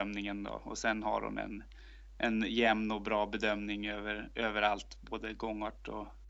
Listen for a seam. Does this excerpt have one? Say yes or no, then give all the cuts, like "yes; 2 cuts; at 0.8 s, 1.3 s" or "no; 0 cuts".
no; 0 cuts